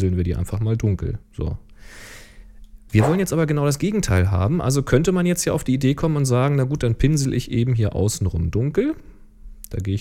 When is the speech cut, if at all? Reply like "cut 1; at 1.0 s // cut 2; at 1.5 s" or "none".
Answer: cut 1; at 1.2 s